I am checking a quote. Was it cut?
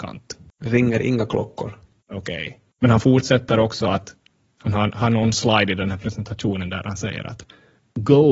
no; 0 cuts

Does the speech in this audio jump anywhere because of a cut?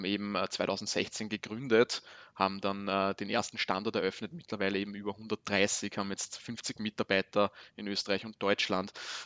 no; 0 cuts

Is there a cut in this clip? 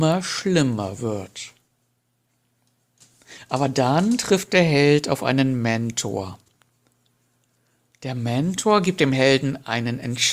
no; 0 cuts

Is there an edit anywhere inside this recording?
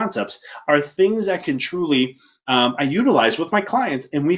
no; 0 cuts

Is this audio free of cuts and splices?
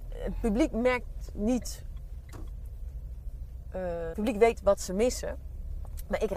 no; 2 cuts; at 4.1 s, 4.6 s

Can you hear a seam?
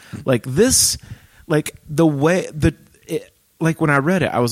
no; 0 cuts

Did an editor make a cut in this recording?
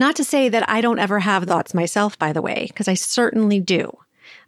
yes; 1 cut; at 1.5 s

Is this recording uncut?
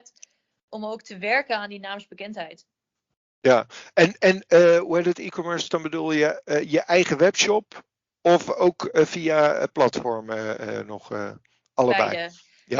yes; 0 cuts

